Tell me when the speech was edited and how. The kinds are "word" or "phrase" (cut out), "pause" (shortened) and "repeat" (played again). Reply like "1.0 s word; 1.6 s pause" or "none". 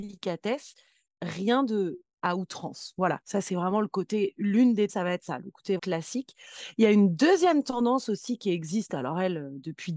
4.9 s phrase; 5.8 s word